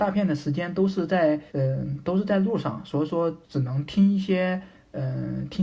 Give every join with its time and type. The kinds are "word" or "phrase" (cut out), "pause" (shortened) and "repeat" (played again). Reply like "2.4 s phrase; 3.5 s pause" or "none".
1.5 s pause; 3.4 s pause